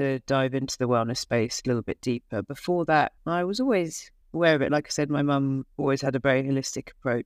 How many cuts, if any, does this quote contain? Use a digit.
2